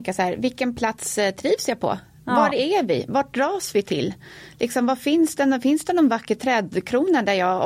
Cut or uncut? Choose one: uncut